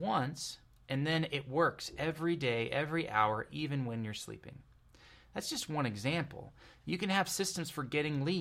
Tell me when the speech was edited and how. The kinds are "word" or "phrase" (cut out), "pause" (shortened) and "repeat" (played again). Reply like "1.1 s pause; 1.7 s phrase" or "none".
none